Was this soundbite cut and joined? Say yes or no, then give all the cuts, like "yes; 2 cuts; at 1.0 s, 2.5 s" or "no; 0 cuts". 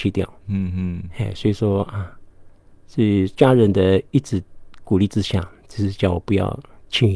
no; 0 cuts